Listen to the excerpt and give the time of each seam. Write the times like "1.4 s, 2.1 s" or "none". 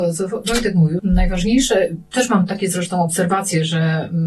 1.0 s